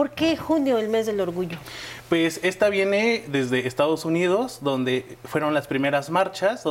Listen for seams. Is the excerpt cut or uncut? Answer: uncut